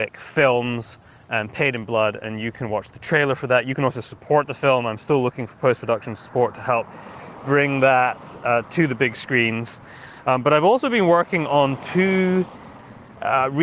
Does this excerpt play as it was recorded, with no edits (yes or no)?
yes